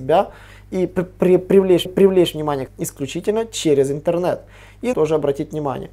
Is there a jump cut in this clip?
yes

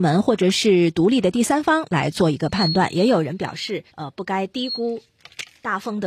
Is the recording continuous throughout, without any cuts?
no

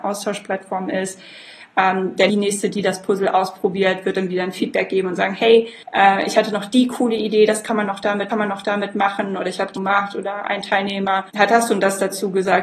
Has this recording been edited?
yes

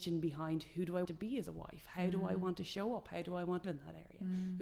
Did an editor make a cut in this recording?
yes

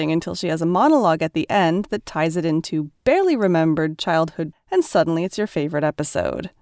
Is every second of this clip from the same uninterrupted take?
no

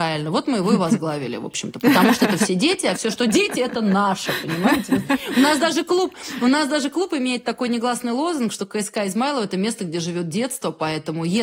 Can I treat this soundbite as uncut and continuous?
yes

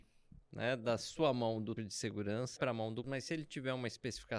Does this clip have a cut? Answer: yes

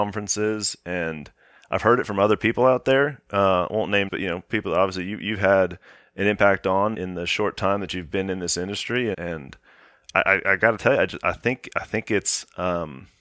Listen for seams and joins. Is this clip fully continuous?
no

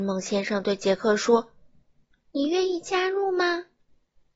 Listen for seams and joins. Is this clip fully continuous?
yes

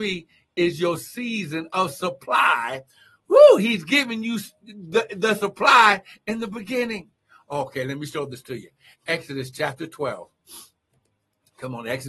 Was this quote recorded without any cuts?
yes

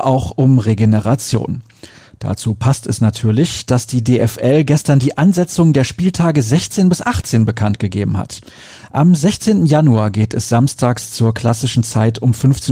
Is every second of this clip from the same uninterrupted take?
yes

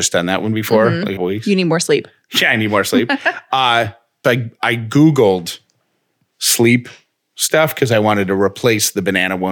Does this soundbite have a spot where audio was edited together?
yes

